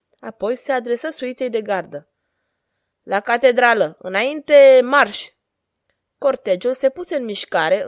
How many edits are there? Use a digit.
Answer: 0